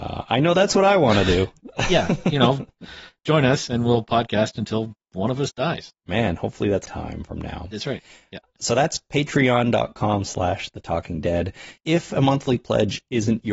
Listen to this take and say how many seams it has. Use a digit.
3